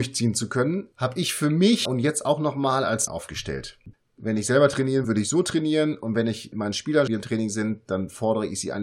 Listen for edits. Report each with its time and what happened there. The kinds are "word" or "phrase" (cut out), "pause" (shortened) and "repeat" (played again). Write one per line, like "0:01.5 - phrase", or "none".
0:01.9 - phrase
0:03.1 - phrase
0:05.0 - word
0:06.5 - word
0:07.1 - phrase